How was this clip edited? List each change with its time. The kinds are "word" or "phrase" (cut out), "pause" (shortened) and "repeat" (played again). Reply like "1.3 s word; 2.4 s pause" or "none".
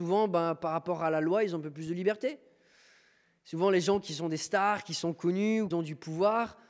5.7 s word